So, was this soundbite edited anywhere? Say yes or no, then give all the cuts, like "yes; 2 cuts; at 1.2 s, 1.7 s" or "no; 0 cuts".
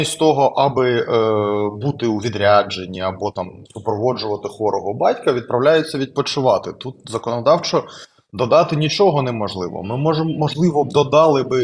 no; 0 cuts